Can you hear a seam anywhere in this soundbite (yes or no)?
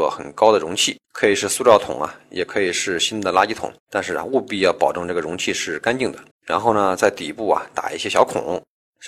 yes